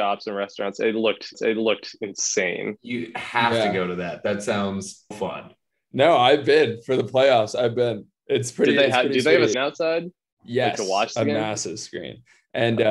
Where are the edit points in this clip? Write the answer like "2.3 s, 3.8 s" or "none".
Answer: 1.3 s, 5.1 s, 9.5 s